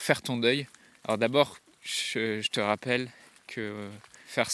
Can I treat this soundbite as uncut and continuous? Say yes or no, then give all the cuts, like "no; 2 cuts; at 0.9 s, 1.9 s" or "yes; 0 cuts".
yes; 0 cuts